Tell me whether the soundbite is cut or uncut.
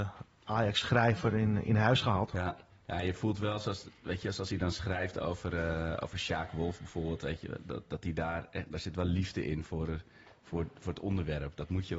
uncut